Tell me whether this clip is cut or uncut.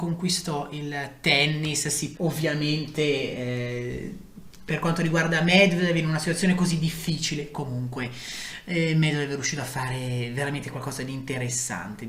cut